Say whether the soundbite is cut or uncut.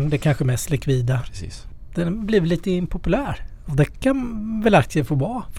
uncut